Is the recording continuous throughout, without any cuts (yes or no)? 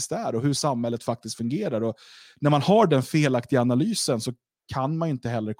yes